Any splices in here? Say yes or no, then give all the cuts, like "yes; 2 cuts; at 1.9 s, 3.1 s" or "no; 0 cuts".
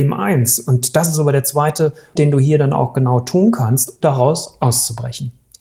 yes; 2 cuts; at 2.1 s, 4.0 s